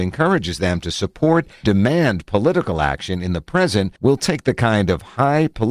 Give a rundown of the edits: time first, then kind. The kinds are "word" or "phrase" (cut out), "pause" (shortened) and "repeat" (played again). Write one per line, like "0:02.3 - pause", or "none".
0:01.6 - word
0:04.0 - pause